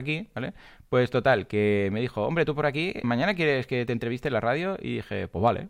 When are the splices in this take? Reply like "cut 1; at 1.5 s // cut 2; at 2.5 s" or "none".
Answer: cut 1; at 3.0 s